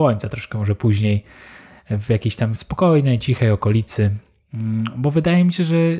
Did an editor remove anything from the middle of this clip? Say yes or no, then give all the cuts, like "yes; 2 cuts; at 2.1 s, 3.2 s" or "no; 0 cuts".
no; 0 cuts